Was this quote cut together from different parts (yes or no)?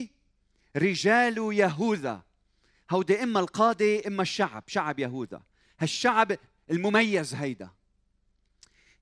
no